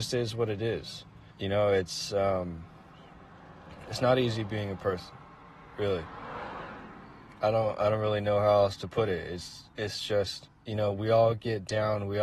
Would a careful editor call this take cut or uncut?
cut